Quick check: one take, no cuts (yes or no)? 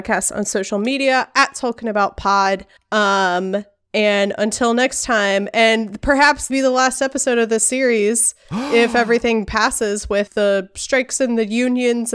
no